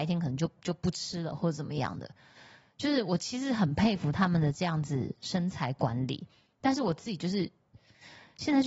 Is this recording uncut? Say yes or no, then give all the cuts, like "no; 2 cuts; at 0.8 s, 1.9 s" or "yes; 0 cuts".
yes; 0 cuts